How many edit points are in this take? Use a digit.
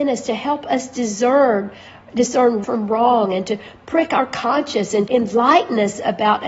2